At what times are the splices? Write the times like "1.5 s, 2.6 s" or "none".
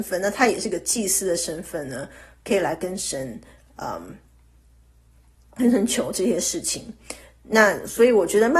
none